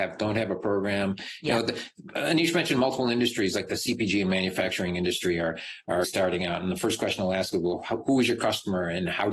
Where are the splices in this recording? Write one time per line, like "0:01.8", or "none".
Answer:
0:06.0